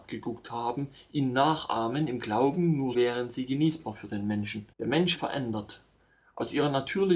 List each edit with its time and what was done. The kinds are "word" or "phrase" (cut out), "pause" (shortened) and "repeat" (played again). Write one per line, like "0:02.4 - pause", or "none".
0:02.9 - word
0:04.7 - pause
0:05.1 - phrase

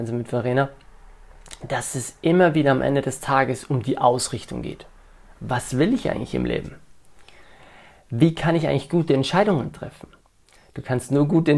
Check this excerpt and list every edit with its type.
none

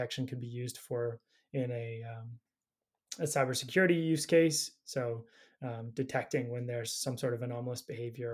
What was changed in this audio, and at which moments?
none

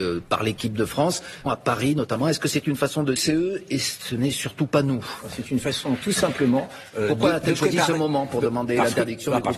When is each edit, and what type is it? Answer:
0:01.5 - phrase
0:03.2 - word

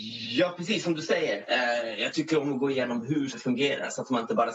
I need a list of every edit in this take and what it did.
0:03.3 - word

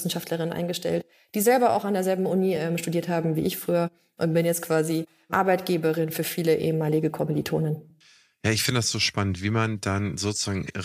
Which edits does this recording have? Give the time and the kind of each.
none

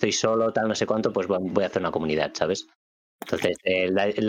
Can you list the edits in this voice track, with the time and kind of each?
none

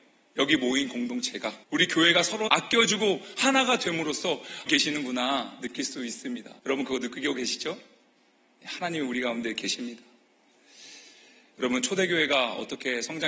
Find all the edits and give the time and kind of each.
0:01.6 - pause
0:02.5 - word
0:04.7 - phrase
0:06.6 - pause

